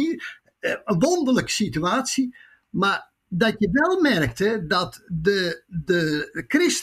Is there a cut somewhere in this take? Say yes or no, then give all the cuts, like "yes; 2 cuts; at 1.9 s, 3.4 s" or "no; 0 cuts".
no; 0 cuts